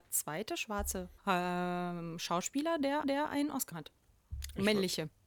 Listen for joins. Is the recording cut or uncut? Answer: cut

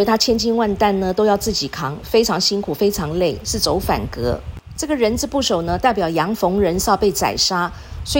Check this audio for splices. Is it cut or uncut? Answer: uncut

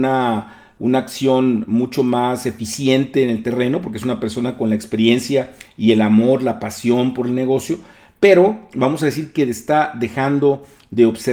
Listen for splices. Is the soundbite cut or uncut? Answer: uncut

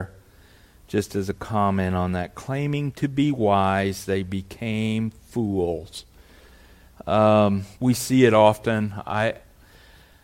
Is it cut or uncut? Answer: cut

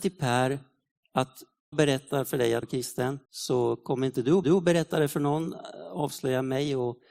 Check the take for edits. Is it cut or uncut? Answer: cut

